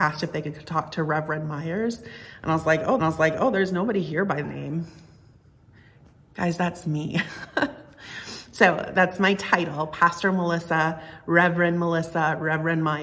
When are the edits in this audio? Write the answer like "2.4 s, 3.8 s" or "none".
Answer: 3.0 s, 4.4 s